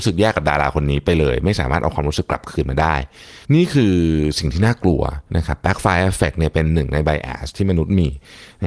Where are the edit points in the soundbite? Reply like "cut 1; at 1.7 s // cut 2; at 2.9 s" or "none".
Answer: cut 1; at 3.4 s // cut 2; at 5.3 s